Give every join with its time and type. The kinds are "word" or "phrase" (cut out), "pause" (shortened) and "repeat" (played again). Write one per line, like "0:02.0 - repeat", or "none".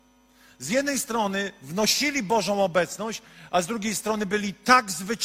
none